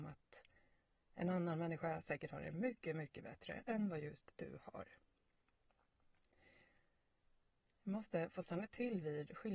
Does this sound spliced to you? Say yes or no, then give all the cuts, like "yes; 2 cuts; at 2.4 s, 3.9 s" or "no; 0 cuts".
no; 0 cuts